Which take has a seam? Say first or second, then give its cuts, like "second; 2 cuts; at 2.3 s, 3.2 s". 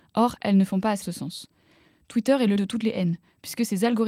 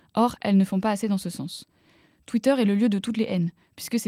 first; 2 cuts; at 1.0 s, 2.6 s